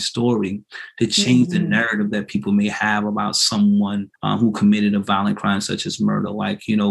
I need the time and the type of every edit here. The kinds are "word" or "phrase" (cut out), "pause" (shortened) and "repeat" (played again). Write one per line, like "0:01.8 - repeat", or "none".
0:04.2 - pause